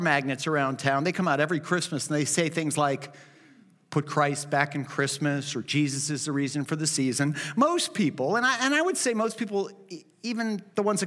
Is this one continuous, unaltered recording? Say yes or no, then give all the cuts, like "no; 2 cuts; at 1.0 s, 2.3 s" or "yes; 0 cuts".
yes; 0 cuts